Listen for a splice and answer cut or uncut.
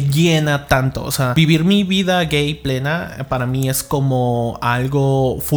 uncut